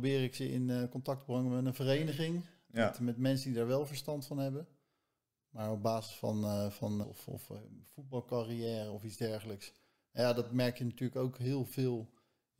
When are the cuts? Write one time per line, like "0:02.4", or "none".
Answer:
0:07.0